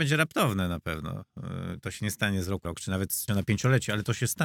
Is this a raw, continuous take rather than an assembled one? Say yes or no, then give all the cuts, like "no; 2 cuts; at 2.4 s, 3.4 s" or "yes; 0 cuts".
no; 2 cuts; at 2.6 s, 3.3 s